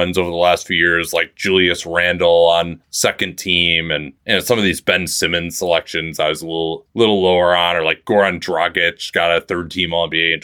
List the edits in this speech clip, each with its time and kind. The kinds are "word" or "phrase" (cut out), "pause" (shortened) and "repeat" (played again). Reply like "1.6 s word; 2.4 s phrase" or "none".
none